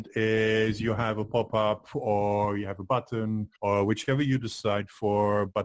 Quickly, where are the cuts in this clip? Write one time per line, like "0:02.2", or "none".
0:03.6